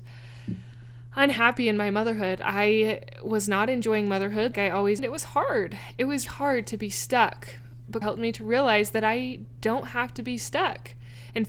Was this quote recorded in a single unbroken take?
no; 4 cuts; at 4.5 s, 5.0 s, 6.3 s, 8.0 s

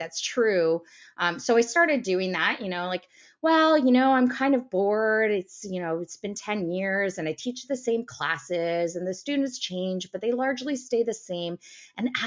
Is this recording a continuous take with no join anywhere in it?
yes; 0 cuts

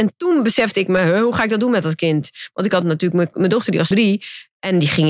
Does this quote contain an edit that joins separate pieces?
yes; 1 cut; at 3.9 s

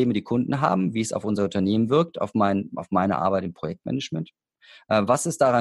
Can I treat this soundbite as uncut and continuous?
yes; 0 cuts

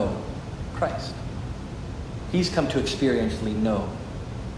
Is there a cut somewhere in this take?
no; 0 cuts

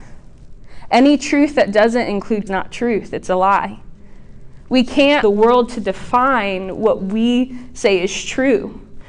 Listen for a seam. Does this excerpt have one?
yes; 2 cuts; at 2.5 s, 5.2 s

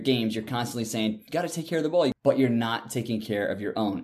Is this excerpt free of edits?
yes; 0 cuts

